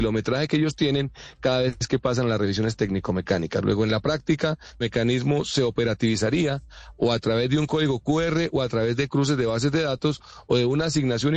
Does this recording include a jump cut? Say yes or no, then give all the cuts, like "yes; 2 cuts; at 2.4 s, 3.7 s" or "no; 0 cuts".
yes; 1 cut; at 4.8 s